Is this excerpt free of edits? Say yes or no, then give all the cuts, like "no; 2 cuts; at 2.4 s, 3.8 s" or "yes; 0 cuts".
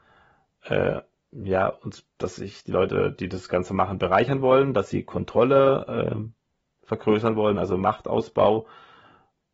yes; 0 cuts